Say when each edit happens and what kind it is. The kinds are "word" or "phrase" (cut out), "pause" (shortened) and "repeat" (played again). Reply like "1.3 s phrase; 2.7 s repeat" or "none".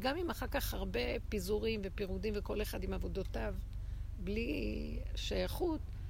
none